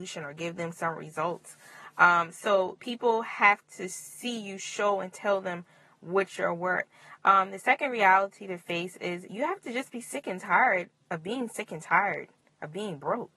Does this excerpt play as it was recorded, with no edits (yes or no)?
yes